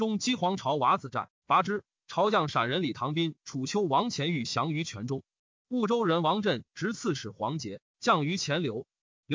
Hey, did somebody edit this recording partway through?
no; 0 cuts

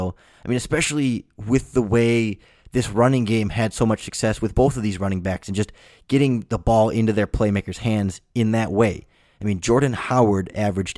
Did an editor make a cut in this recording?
yes; 1 cut; at 4.5 s

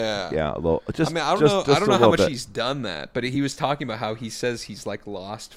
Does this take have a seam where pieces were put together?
no; 0 cuts

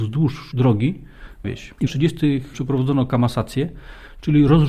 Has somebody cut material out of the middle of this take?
yes; 2 cuts; at 1.4 s, 1.9 s

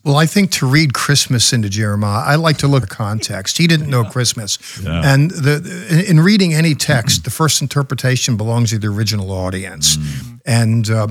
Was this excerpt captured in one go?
no; 1 cut; at 2.8 s

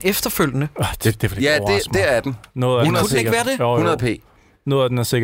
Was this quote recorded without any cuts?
yes; 0 cuts

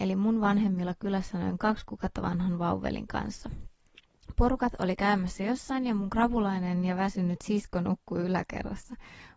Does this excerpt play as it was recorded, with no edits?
yes; 0 cuts

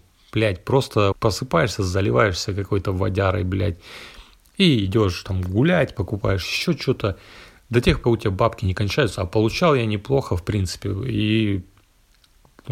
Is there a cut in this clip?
yes; 2 cuts; at 1.1 s, 8.0 s

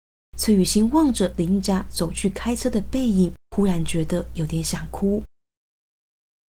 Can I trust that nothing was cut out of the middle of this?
no; 1 cut; at 3.4 s

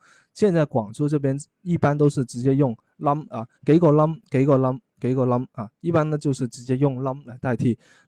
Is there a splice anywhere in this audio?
yes; 2 cuts; at 3.5 s, 4.9 s

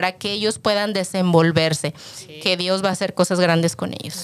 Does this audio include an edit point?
no; 0 cuts

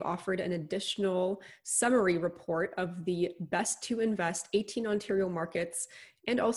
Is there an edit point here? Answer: no; 0 cuts

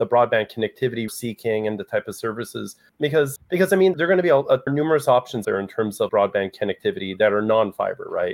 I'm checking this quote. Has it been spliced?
yes; 7 cuts; at 1.1 s, 2.9 s, 3.4 s, 3.9 s, 4.7 s, 5.4 s, 6.1 s

